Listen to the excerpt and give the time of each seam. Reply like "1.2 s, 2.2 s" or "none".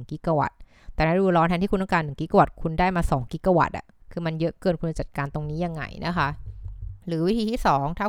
4.0 s, 7.0 s